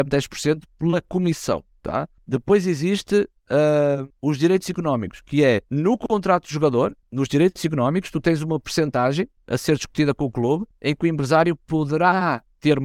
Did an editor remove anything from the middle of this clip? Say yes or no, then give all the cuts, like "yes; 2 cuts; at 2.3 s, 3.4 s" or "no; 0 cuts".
yes; 1 cut; at 5.6 s